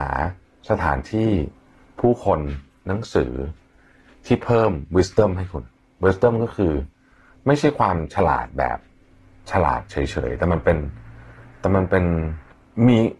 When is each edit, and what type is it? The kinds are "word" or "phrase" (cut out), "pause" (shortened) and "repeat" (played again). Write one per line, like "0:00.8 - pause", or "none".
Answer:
none